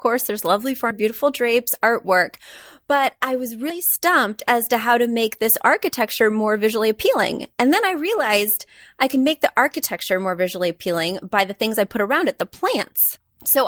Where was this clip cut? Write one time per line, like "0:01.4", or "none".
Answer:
none

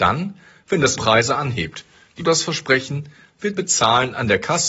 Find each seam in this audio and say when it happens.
0:01.0
0:02.2
0:03.6

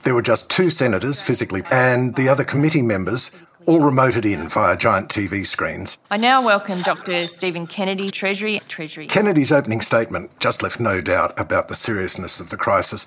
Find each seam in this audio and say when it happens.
0:01.6
0:06.0
0:08.1
0:08.6

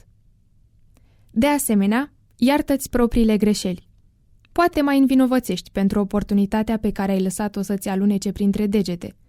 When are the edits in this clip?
0:04.7

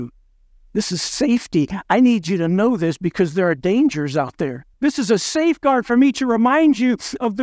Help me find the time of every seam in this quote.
0:04.7

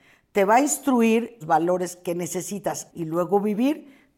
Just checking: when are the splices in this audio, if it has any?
0:01.4
0:02.9

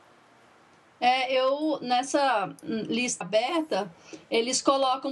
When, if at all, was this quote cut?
0:03.2

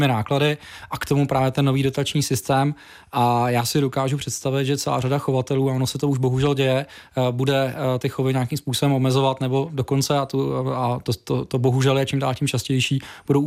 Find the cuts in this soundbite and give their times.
none

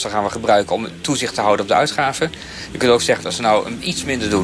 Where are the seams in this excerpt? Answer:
0:03.2

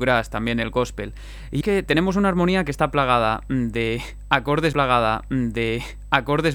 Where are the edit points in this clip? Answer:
0:01.6
0:04.7

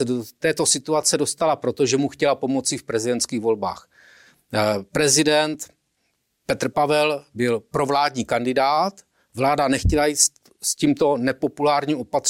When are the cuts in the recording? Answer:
none

